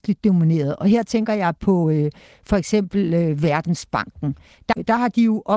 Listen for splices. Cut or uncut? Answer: uncut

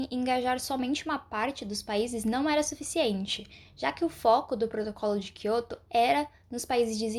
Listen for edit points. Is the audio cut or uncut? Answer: uncut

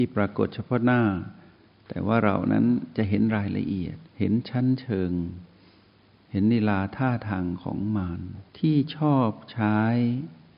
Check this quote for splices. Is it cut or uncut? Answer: cut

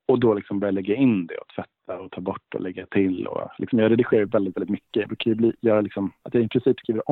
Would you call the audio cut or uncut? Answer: uncut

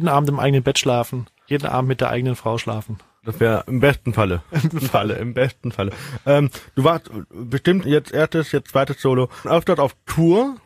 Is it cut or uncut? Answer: cut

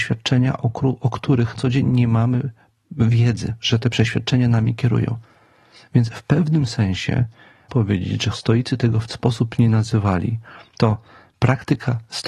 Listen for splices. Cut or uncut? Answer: cut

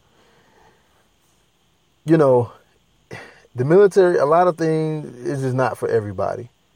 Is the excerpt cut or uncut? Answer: uncut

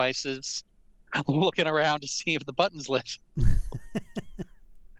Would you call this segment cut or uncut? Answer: uncut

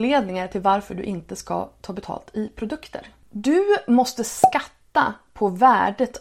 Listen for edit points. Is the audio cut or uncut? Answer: uncut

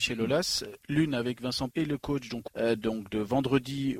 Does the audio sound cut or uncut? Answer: cut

